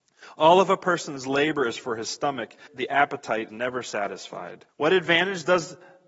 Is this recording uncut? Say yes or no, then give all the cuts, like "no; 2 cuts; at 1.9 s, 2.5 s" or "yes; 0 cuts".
no; 3 cuts; at 2.7 s, 3.5 s, 4.7 s